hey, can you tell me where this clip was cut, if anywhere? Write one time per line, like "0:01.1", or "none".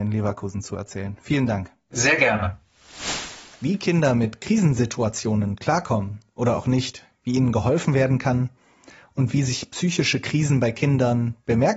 none